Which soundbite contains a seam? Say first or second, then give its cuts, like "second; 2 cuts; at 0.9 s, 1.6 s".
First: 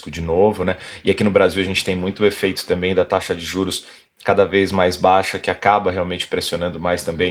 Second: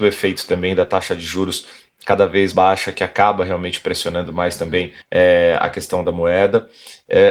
second; 2 cuts; at 2.5 s, 5.0 s